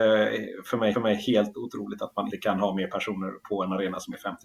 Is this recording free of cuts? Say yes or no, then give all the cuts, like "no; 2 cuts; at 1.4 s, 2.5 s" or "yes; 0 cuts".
no; 2 cuts; at 0.9 s, 2.3 s